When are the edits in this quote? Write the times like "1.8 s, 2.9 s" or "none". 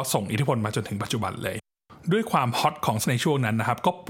3.0 s

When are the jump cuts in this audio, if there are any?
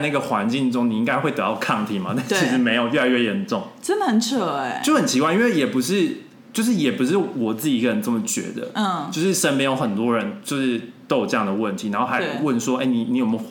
none

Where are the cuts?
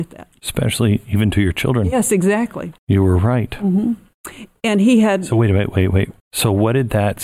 2.8 s, 6.2 s

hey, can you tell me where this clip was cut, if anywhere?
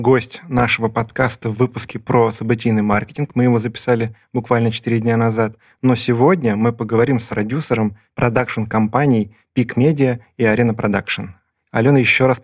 7.3 s

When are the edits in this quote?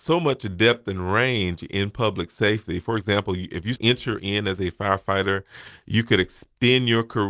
none

